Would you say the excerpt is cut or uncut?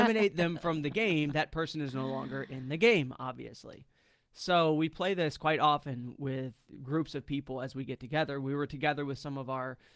uncut